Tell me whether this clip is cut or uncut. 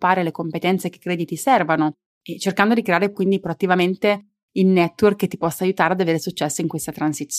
uncut